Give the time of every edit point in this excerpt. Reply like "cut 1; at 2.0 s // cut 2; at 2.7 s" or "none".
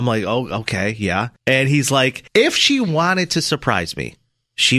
cut 1; at 1.4 s // cut 2; at 2.3 s